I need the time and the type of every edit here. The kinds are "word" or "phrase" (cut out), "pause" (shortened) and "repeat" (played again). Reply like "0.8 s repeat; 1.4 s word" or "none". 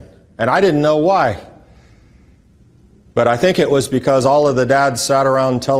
none